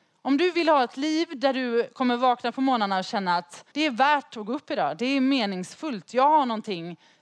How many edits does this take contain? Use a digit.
1